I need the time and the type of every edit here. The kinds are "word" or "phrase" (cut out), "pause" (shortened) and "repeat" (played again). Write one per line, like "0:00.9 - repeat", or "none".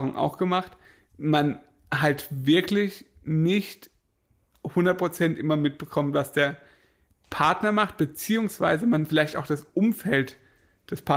none